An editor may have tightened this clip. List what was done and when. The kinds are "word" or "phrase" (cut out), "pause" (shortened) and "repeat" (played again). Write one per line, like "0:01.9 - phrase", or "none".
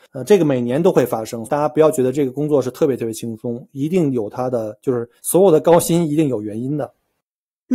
0:01.4 - phrase
0:05.2 - pause